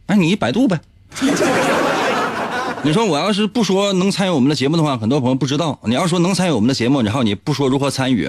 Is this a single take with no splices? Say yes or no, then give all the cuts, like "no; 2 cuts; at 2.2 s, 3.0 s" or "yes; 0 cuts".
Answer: yes; 0 cuts